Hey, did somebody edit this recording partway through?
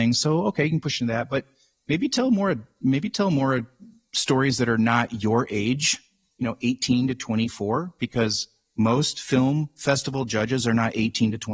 no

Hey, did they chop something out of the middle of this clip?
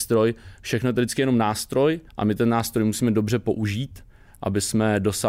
yes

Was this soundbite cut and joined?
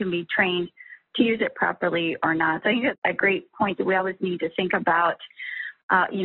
no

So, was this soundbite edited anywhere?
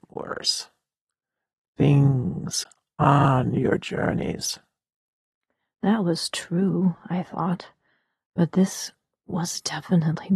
no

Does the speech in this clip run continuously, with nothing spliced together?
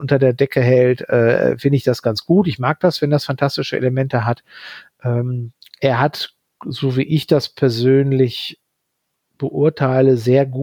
yes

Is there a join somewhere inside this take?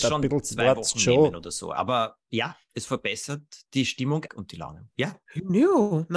yes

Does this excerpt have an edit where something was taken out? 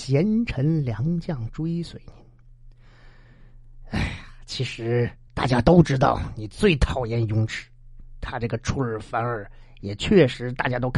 no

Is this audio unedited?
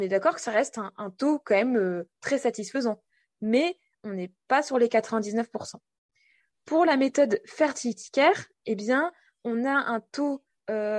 yes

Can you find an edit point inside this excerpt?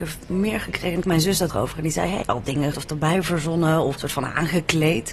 yes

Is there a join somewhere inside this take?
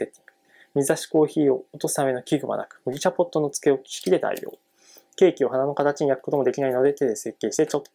no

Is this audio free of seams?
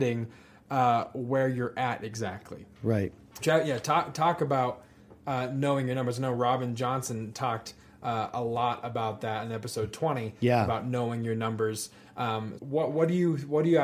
no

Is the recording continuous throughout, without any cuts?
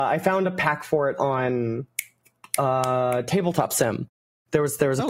yes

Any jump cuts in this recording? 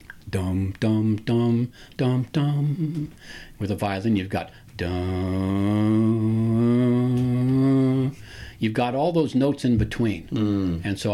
no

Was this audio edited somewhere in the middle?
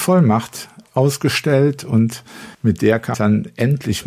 yes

